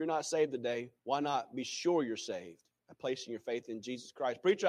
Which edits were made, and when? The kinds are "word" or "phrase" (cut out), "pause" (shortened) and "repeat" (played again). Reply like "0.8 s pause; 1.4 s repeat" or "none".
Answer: 1.0 s pause; 2.8 s pause